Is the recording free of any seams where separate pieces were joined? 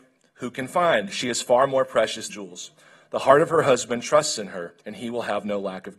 no; 2 cuts; at 2.3 s, 4.8 s

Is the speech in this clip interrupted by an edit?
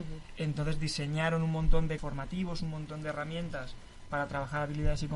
yes; 1 cut; at 2.0 s

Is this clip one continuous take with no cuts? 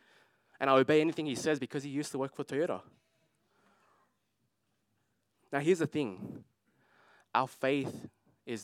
yes; 0 cuts

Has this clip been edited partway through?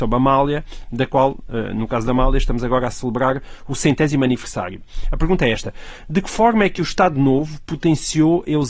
no; 0 cuts

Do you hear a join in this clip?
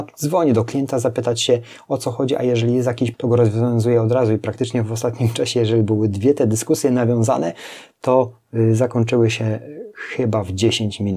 yes; 1 cut; at 3.1 s

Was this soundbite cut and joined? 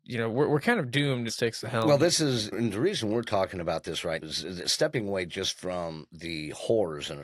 yes; 3 cuts; at 1.3 s, 2.5 s, 4.2 s

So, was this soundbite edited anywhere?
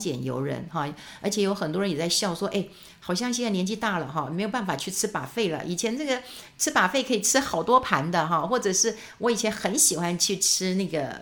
no; 0 cuts

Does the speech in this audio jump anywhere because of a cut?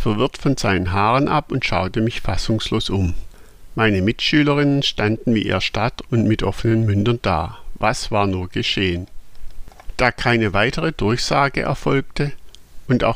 no; 0 cuts

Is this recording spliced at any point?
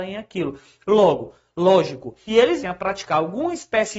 yes; 2 cuts; at 2.3 s, 2.6 s

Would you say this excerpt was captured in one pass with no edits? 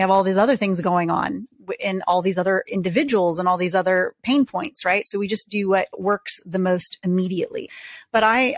yes; 0 cuts

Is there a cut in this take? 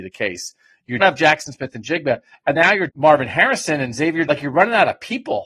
yes; 4 cuts; at 1.0 s, 2.5 s, 2.9 s, 4.3 s

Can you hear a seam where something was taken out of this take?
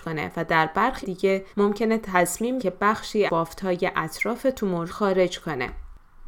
yes; 5 cuts; at 1.0 s, 1.5 s, 2.6 s, 3.3 s, 4.9 s

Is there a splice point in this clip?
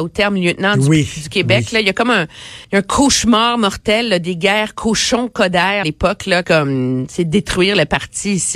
yes; 3 cuts; at 2.6 s, 5.8 s, 6.4 s

